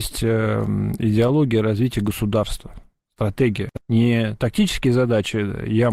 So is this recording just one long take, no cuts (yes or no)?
no